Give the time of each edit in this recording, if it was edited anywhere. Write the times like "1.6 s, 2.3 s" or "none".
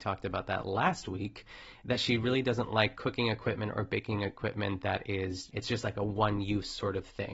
5.5 s